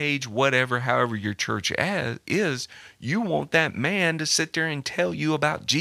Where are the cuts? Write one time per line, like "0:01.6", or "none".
none